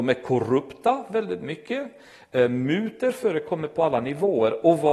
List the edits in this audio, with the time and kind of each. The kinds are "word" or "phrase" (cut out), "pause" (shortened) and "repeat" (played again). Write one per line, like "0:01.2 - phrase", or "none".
none

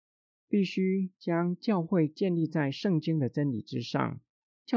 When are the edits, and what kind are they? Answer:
none

